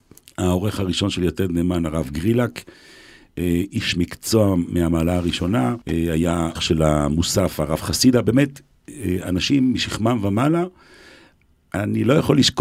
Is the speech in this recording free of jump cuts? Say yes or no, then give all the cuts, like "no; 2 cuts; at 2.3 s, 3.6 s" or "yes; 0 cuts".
no; 2 cuts; at 5.8 s, 6.6 s